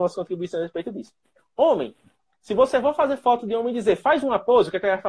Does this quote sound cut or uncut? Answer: uncut